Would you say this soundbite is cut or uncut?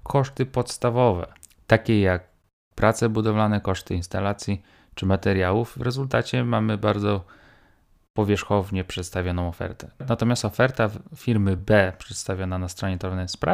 uncut